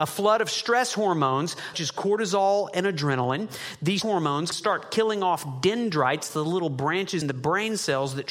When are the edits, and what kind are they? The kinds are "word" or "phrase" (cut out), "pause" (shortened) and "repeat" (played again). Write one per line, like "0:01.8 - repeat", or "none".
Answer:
0:01.7 - word
0:04.0 - word
0:04.5 - word
0:07.2 - word